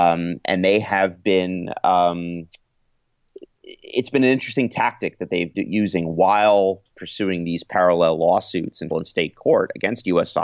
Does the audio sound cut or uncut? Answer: cut